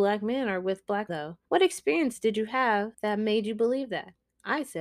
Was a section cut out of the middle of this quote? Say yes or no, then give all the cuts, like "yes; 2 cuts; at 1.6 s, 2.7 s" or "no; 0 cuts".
yes; 3 cuts; at 1.1 s, 1.4 s, 2.9 s